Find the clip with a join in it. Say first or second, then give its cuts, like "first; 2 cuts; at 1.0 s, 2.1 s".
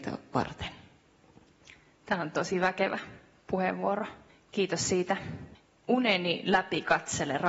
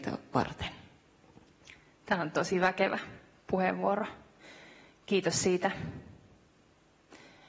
first; 2 cuts; at 4.3 s, 5.5 s